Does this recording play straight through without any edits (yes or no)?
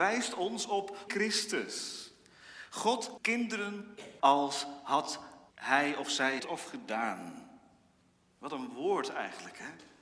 no